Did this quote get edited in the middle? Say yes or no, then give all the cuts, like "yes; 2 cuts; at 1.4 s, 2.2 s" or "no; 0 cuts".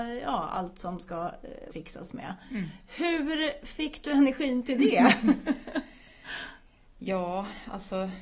yes; 1 cut; at 1.7 s